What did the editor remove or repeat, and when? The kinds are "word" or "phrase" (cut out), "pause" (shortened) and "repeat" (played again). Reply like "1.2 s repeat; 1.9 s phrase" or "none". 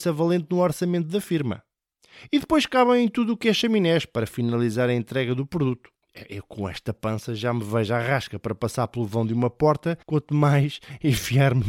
10.0 s pause